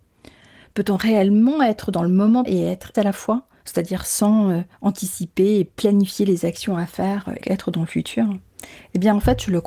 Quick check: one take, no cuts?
no; 4 cuts; at 2.5 s, 2.9 s, 4.7 s, 7.4 s

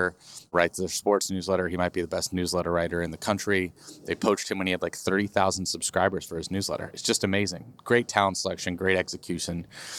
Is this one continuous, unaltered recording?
yes; 0 cuts

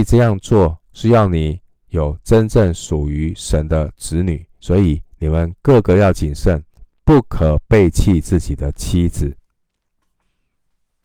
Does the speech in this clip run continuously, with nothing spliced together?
no; 1 cut; at 4.6 s

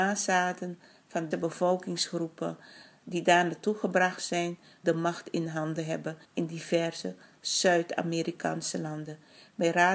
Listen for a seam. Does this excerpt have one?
yes; 3 cuts; at 1.3 s, 4.8 s, 6.2 s

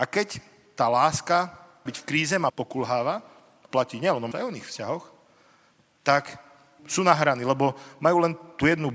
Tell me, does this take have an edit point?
yes; 5 cuts; at 1.9 s, 2.5 s, 3.7 s, 4.3 s, 6.8 s

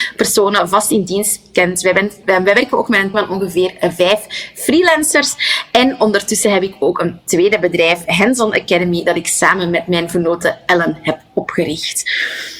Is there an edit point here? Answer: yes; 2 cuts; at 2.2 s, 3.1 s

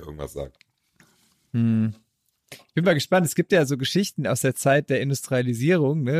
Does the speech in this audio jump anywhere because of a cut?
no; 0 cuts

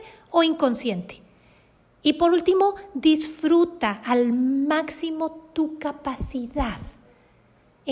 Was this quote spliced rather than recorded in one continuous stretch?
no; 0 cuts

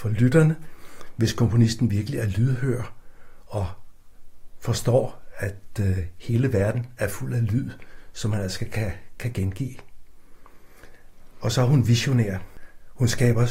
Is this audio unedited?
yes; 0 cuts

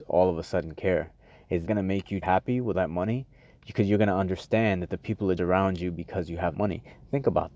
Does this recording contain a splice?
yes; 5 cuts; at 1.7 s, 2.2 s, 2.7 s, 5.4 s, 6.5 s

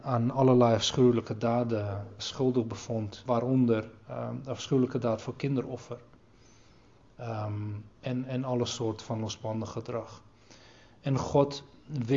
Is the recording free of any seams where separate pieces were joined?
no; 3 cuts; at 2.2 s, 3.3 s, 7.9 s

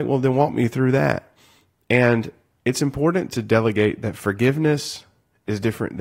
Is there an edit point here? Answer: no; 0 cuts

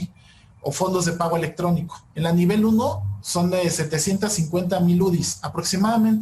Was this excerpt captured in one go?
no; 1 cut; at 2.1 s

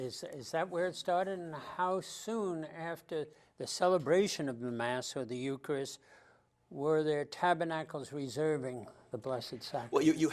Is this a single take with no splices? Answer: yes; 0 cuts

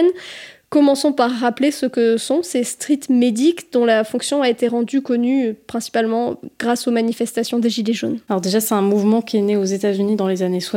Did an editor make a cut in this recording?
yes; 1 cut; at 8.2 s

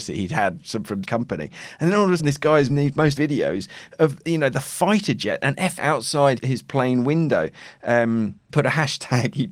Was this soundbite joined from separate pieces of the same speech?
yes; 8 cuts; at 1.0 s, 2.2 s, 2.7 s, 3.2 s, 4.2 s, 5.8 s, 6.4 s, 8.5 s

